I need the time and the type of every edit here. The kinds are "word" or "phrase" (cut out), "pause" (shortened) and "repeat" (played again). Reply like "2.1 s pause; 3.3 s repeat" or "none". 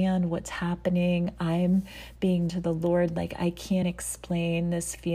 2.5 s word; 3.8 s word